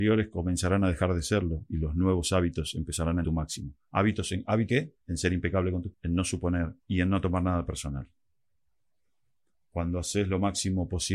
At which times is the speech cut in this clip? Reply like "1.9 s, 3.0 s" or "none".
3.2 s, 4.7 s, 5.0 s, 5.9 s, 6.8 s